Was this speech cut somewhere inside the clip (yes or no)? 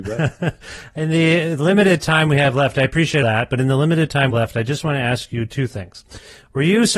yes